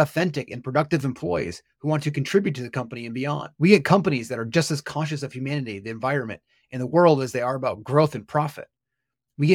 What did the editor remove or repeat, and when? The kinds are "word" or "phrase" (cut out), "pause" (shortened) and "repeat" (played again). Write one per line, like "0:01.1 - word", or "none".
0:03.5 - pause